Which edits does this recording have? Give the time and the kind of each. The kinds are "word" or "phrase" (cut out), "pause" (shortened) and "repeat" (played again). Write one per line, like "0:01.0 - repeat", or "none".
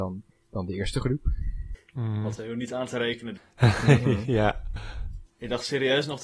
0:02.4 - word